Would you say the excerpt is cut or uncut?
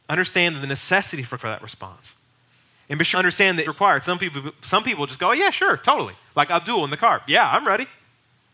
cut